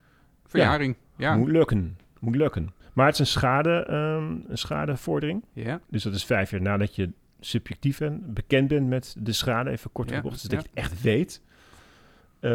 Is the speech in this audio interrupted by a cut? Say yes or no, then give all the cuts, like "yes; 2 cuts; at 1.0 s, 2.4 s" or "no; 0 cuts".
yes; 1 cut; at 5.8 s